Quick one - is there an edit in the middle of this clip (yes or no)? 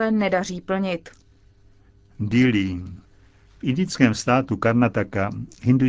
no